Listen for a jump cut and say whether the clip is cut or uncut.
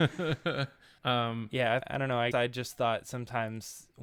cut